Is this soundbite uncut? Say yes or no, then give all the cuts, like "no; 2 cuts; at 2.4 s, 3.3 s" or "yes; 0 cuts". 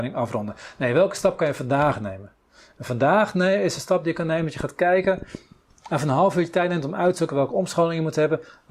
yes; 0 cuts